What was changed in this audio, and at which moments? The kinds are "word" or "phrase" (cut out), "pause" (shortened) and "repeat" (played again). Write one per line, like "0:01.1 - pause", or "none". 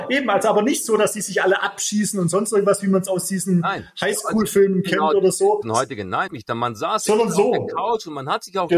0:05.6 - word
0:06.3 - word